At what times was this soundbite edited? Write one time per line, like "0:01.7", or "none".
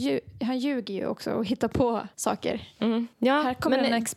0:02.1
0:03.1